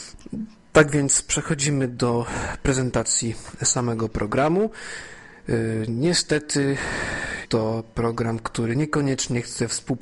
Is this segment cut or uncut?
cut